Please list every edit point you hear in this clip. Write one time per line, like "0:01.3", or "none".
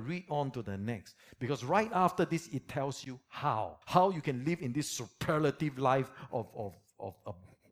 0:03.8